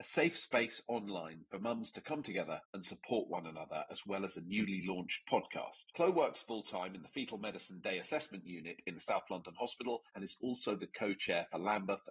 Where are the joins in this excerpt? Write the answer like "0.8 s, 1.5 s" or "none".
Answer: 2.6 s, 5.9 s, 10.1 s